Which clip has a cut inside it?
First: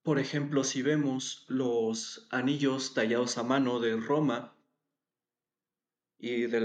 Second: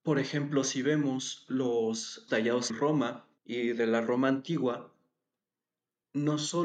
second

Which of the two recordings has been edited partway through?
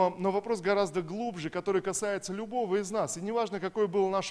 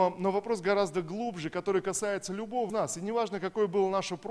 second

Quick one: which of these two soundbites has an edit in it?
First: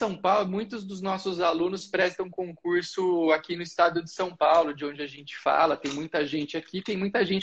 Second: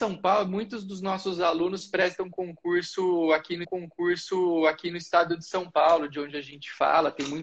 second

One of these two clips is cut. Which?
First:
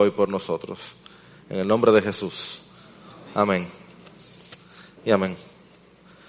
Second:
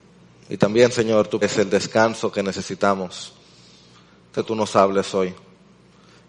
second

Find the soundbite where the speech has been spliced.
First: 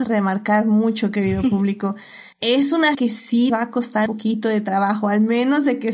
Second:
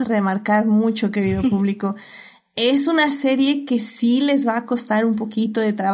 first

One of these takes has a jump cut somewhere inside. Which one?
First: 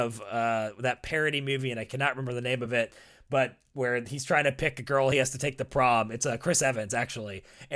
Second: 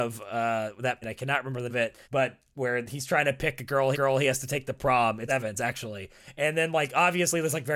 second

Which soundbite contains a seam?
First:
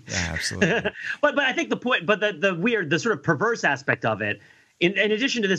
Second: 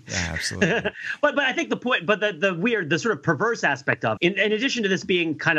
second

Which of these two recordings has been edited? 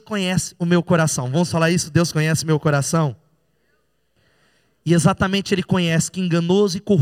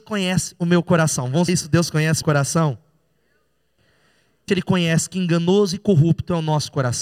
second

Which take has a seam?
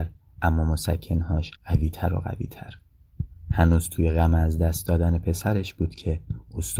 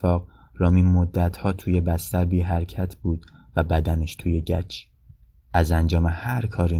first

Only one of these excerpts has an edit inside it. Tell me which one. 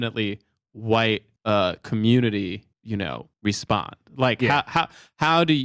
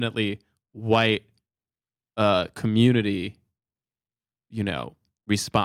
first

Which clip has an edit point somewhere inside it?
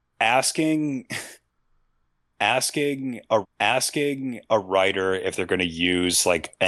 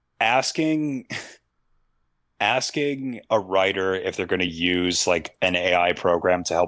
first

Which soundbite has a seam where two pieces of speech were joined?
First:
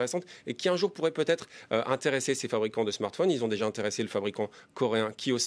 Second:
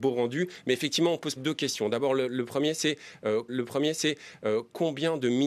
second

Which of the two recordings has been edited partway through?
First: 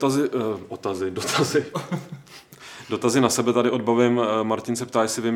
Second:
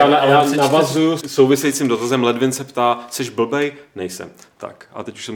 second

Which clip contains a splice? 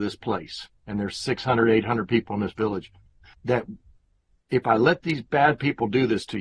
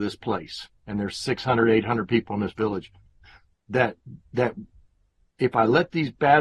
first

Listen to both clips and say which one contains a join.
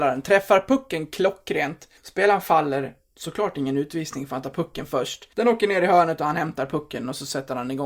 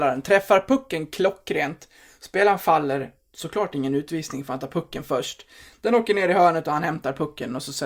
first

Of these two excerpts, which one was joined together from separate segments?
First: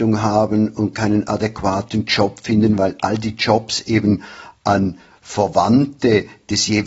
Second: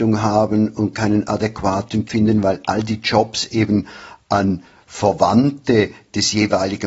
second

